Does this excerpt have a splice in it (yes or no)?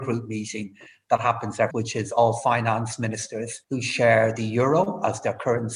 yes